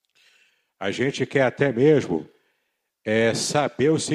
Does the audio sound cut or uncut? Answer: uncut